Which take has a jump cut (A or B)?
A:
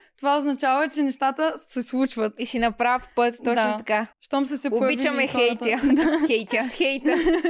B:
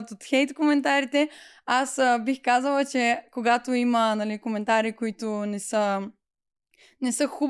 A